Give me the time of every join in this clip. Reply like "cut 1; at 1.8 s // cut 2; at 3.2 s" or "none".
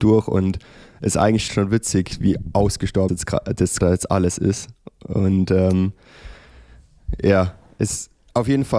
cut 1; at 1.5 s // cut 2; at 3.1 s // cut 3; at 3.8 s